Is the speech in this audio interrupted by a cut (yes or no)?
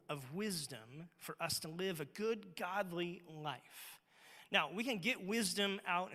no